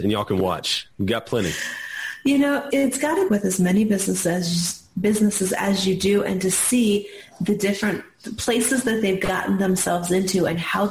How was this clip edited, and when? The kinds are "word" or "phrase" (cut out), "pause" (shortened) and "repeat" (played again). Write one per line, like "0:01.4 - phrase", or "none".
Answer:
0:02.7 - word
0:03.3 - phrase